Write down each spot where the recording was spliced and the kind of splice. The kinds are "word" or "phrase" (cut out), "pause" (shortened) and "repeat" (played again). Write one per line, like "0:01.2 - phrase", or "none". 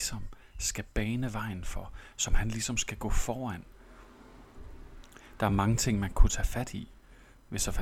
none